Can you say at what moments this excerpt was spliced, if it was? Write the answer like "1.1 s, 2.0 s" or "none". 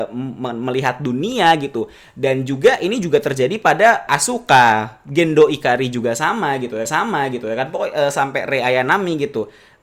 4.1 s, 6.8 s